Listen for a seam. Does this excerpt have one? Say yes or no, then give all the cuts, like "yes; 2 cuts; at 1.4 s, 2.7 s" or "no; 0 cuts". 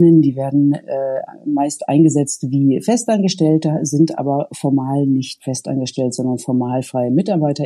no; 0 cuts